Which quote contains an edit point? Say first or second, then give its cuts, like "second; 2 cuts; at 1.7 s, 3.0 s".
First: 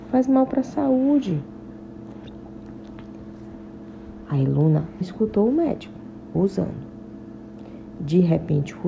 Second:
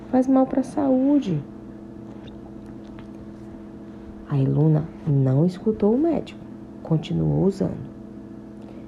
first; 2 cuts; at 5.0 s, 6.3 s